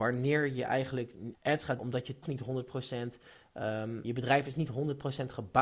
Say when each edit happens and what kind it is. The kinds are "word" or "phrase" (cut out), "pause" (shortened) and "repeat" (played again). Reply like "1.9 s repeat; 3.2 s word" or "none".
1.3 s word; 1.8 s word; 2.2 s word; 4.0 s word